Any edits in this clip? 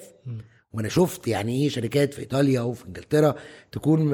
no; 0 cuts

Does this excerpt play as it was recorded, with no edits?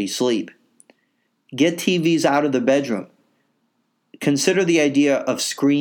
yes; 0 cuts

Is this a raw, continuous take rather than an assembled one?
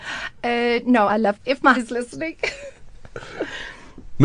no; 3 cuts; at 1.1 s, 1.4 s, 1.7 s

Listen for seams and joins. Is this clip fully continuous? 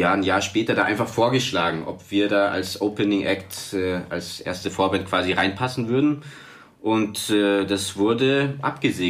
yes; 0 cuts

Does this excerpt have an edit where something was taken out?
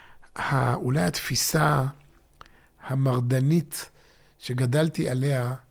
no; 0 cuts

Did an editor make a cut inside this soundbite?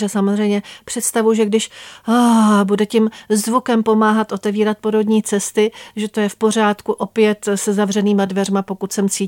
no; 0 cuts

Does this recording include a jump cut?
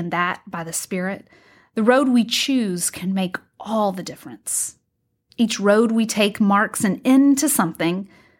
no; 0 cuts

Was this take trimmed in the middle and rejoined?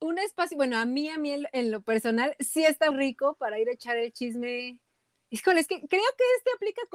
yes; 1 cut; at 2.9 s

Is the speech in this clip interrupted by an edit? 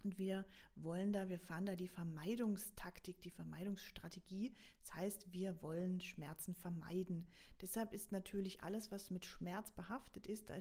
no; 0 cuts

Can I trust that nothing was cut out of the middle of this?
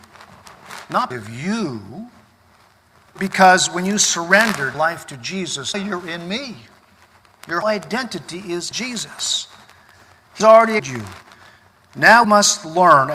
no; 9 cuts; at 1.1 s, 3.2 s, 4.7 s, 5.7 s, 7.6 s, 8.7 s, 10.4 s, 10.8 s, 12.2 s

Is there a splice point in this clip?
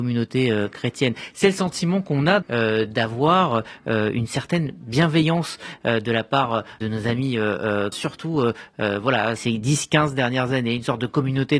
yes; 4 cuts; at 2.4 s, 6.8 s, 7.9 s, 9.4 s

